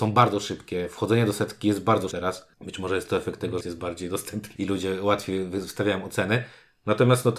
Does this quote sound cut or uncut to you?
cut